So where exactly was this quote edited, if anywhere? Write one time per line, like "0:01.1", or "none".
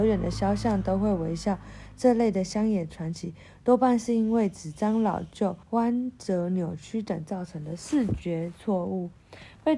0:05.6